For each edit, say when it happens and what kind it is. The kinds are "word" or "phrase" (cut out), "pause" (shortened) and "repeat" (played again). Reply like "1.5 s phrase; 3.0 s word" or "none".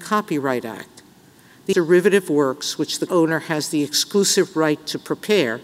1.7 s phrase; 3.1 s word